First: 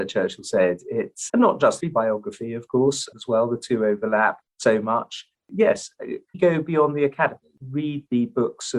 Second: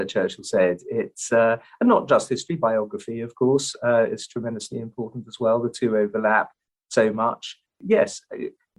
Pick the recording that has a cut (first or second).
first